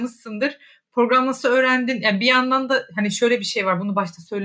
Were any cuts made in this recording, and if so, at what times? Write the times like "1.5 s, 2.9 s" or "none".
none